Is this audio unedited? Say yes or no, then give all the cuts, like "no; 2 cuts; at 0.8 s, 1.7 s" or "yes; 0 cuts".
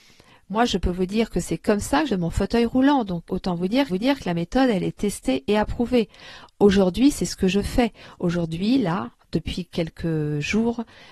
no; 3 cuts; at 2.1 s, 3.3 s, 3.9 s